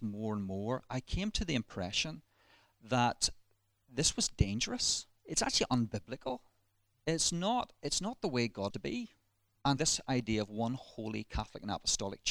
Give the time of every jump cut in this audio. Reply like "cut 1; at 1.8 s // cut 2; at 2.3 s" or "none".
cut 1; at 5.2 s // cut 2; at 8.7 s // cut 3; at 9.8 s